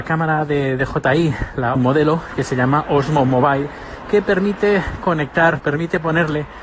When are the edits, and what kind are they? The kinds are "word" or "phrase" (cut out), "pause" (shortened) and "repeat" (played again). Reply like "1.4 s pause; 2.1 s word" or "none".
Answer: 1.8 s phrase; 5.6 s word